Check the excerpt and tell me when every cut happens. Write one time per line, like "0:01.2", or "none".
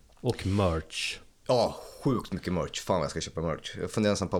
0:01.3